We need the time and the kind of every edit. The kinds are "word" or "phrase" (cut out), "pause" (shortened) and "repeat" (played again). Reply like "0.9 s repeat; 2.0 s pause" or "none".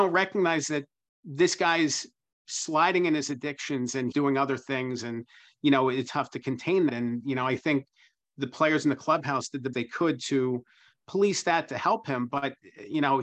4.1 s word; 6.0 s word; 6.9 s word; 9.7 s word